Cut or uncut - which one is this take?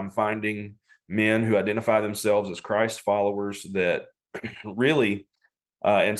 uncut